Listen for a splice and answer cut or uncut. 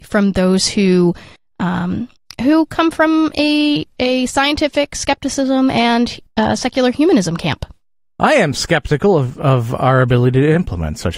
uncut